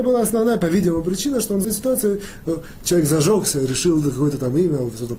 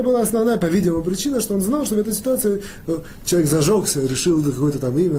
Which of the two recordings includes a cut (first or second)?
first